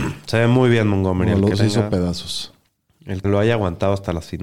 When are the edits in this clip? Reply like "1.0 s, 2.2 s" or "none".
1.5 s, 3.2 s